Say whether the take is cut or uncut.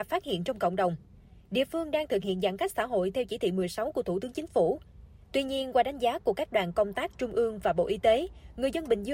uncut